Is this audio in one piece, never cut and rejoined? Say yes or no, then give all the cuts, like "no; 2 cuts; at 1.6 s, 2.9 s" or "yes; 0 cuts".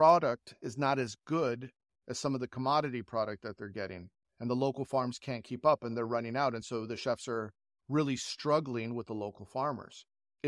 yes; 0 cuts